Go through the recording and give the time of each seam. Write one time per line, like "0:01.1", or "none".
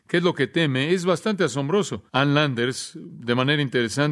0:02.1